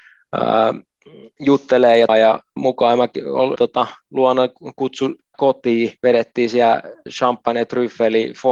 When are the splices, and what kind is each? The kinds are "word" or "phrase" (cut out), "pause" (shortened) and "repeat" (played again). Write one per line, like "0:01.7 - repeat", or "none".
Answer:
0:02.1 - word
0:02.6 - word
0:03.6 - word
0:05.3 - word
0:06.0 - pause
0:07.1 - word